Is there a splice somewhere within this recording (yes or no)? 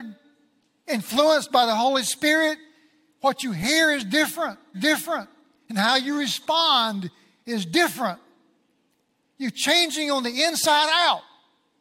yes